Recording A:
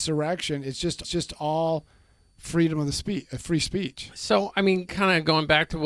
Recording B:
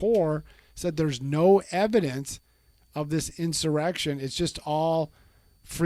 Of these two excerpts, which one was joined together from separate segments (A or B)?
A